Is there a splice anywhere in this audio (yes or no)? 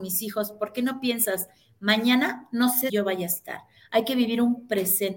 yes